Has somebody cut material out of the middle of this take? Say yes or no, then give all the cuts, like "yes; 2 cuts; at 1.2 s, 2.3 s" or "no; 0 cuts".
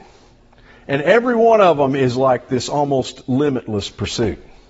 no; 0 cuts